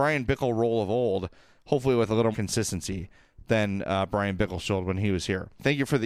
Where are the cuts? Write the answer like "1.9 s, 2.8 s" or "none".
2.3 s